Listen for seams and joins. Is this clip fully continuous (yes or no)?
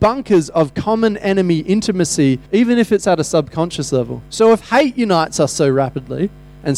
no